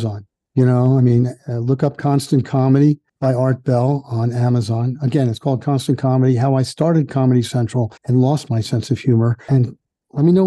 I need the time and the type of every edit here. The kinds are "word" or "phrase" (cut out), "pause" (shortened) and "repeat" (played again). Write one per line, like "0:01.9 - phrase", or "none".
0:03.1 - pause
0:08.0 - pause